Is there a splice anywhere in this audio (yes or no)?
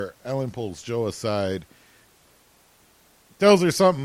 no